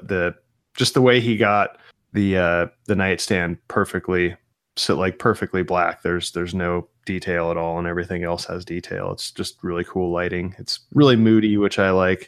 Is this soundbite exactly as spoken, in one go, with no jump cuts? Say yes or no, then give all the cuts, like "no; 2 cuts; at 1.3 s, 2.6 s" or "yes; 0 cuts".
yes; 0 cuts